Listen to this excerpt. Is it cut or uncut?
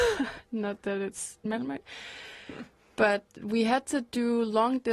cut